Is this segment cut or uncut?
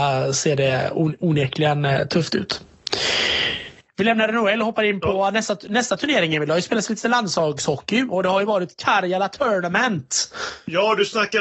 uncut